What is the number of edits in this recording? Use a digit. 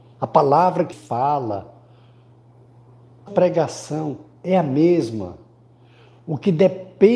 2